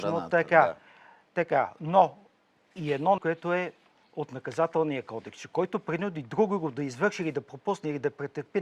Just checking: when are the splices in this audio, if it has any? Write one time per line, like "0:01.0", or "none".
0:02.7
0:03.2

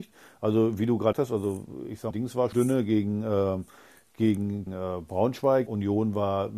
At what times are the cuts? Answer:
0:01.1
0:02.1
0:02.5
0:04.7
0:05.7

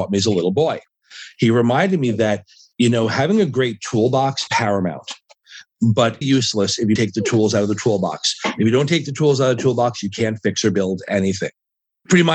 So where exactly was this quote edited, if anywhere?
0:04.5
0:06.2
0:07.0

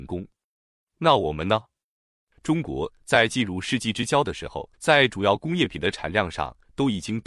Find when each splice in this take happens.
0:04.7

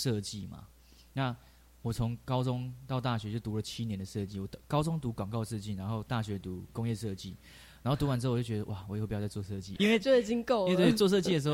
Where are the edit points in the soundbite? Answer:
0:04.6
0:09.8

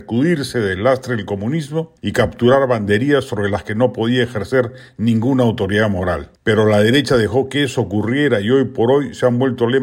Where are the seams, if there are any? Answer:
0:02.0
0:06.4

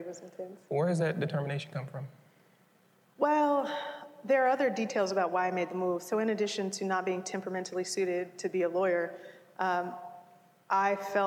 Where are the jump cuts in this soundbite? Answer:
none

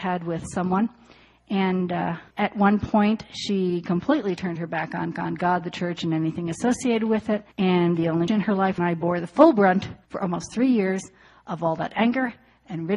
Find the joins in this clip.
0:02.3
0:05.1
0:07.5
0:08.3
0:08.8
0:10.0

